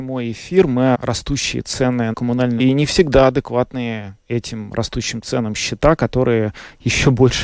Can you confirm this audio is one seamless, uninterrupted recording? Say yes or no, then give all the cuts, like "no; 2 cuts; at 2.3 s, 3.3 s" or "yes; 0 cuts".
no; 3 cuts; at 0.9 s, 2.1 s, 2.6 s